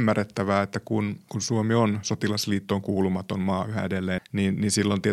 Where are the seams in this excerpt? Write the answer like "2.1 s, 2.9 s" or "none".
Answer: 4.2 s